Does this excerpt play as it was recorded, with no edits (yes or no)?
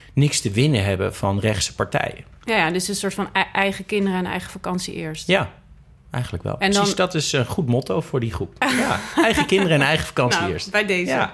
yes